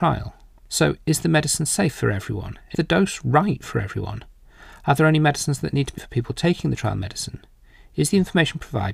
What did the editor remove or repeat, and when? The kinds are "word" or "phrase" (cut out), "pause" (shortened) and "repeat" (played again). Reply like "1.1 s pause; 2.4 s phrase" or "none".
2.7 s word; 6.0 s word